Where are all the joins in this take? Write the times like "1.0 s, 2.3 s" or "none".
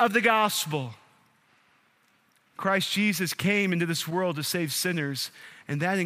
none